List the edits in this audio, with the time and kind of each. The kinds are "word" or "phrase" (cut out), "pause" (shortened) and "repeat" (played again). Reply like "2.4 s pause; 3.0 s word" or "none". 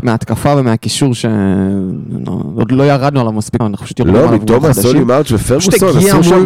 3.6 s phrase